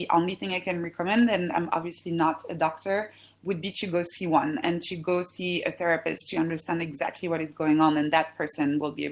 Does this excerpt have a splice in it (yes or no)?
no